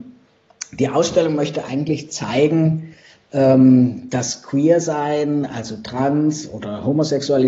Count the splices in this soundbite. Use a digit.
0